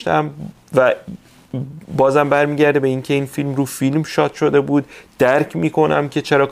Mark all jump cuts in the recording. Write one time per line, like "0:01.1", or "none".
none